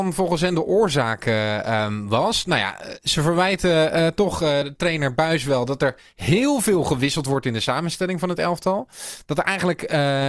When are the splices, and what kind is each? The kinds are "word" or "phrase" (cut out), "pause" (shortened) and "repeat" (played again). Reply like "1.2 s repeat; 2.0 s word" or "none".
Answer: none